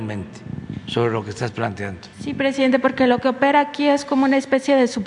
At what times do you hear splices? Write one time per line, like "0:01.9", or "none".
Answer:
0:02.1